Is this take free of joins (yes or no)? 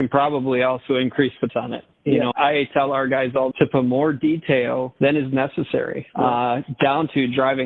no